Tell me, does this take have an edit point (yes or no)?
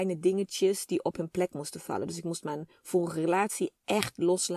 no